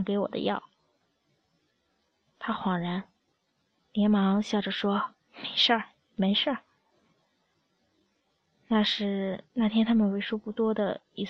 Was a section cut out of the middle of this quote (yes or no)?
no